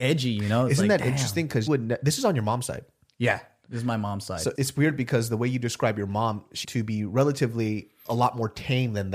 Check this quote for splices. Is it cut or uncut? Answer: cut